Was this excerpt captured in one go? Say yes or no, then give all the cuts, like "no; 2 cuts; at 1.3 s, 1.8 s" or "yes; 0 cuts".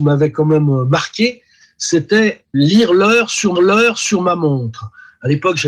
no; 2 cuts; at 2.5 s, 3.5 s